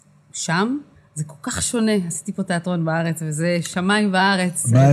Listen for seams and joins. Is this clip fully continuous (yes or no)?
no